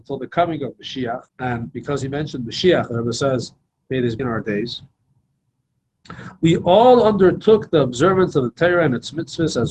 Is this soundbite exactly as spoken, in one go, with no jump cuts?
no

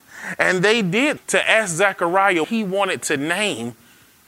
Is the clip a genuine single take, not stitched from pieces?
no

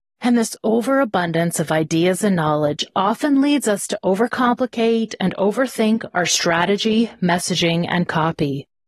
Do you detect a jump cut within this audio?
no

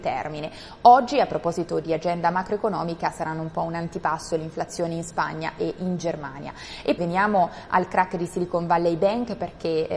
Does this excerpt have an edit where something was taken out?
yes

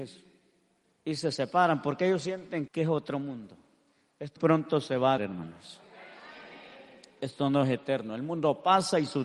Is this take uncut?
no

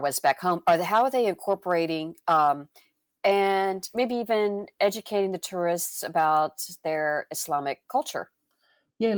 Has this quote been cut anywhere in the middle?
no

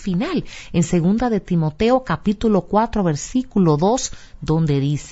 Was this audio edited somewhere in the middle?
no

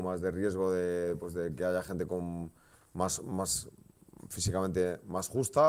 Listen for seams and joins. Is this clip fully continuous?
yes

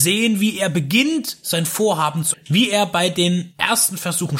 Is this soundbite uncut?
no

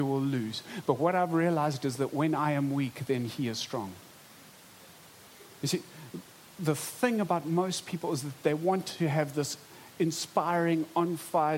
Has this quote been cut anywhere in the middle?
no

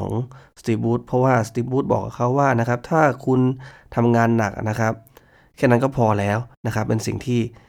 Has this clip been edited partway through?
yes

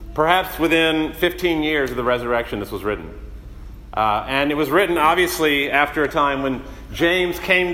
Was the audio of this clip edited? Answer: no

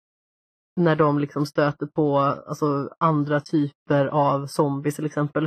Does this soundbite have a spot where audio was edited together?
no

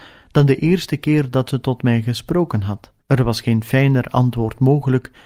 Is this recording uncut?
no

